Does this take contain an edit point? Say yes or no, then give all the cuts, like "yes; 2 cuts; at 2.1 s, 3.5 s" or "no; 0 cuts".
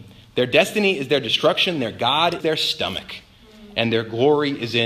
yes; 1 cut; at 2.4 s